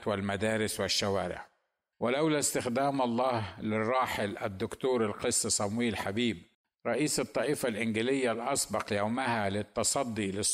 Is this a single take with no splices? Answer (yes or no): yes